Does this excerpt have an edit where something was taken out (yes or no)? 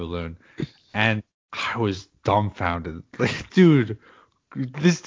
yes